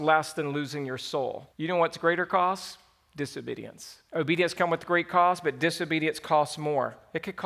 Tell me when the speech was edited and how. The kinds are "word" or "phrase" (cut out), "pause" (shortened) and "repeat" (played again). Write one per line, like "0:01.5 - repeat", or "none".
0:01.5 - pause
0:04.1 - pause